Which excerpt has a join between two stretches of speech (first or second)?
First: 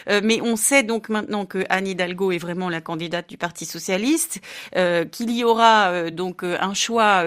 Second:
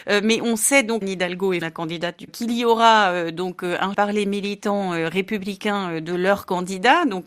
second